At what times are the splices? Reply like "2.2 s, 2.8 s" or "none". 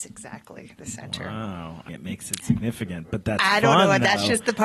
1.9 s